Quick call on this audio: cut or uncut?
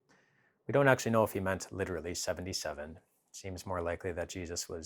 uncut